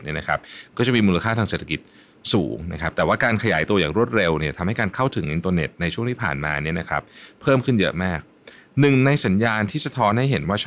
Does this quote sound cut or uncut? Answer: uncut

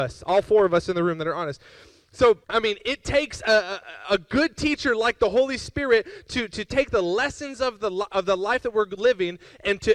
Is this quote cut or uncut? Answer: cut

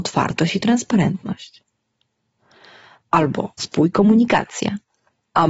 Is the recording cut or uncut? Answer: cut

